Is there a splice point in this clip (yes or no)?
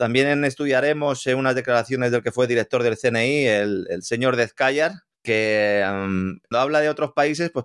yes